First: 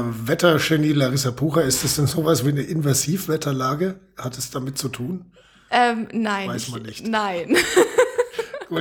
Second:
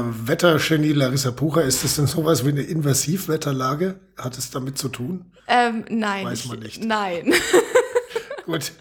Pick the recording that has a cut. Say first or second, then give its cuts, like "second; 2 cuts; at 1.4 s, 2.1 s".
second; 1 cut; at 5.4 s